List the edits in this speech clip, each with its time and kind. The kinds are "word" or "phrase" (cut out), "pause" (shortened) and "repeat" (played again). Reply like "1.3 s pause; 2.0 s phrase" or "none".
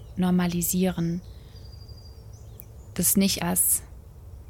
3.4 s word